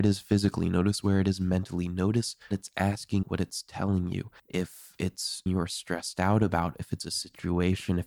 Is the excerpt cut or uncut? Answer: cut